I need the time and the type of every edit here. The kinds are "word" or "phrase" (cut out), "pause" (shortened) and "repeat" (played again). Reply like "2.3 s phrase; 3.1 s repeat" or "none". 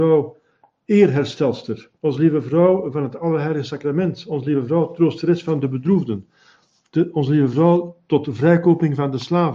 2.0 s pause

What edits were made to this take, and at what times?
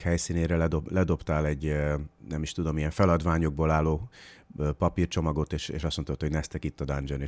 none

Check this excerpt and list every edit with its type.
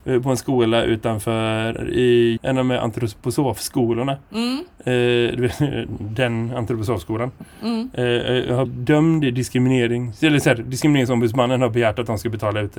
2.4 s word; 8.7 s word

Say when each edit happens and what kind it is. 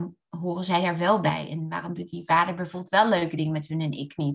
none

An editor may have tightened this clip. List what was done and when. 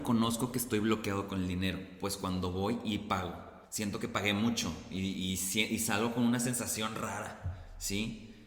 3.7 s pause

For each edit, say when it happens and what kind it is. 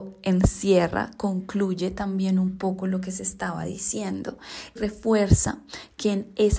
4.8 s word

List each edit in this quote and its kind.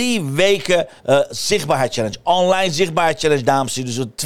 1.0 s pause

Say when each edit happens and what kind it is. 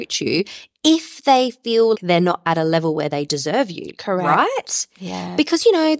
1.9 s word

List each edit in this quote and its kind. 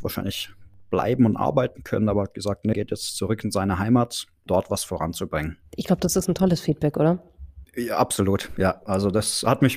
2.7 s word; 4.5 s word; 5.7 s pause

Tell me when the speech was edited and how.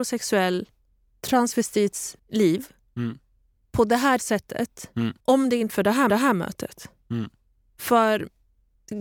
2.2 s pause; 4.2 s word; 5.2 s pause; 5.7 s word; 6.1 s repeat

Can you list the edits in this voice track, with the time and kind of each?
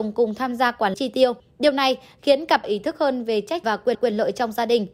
0.9 s word; 1.4 s pause; 2.6 s phrase; 3.6 s word; 3.9 s repeat

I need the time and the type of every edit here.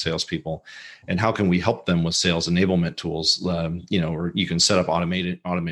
none

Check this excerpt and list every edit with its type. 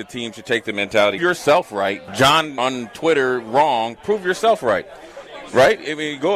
1.2 s phrase; 2.1 s phrase; 2.6 s word

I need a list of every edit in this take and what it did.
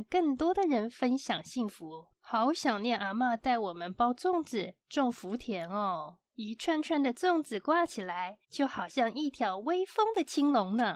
2.1 s pause; 6.3 s pause; 8.4 s pause

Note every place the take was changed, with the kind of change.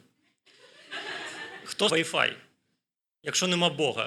1.9 s word

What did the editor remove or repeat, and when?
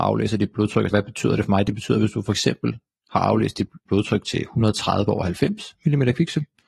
0.9 s word; 3.9 s word

